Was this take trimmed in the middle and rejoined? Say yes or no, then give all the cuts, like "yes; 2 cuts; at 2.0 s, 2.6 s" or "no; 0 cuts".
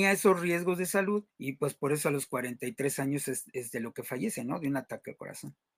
yes; 1 cut; at 1.3 s